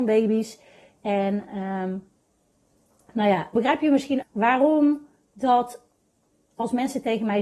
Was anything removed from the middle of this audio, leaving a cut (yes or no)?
yes